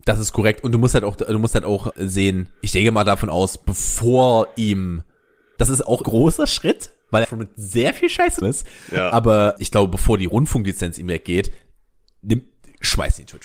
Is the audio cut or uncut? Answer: cut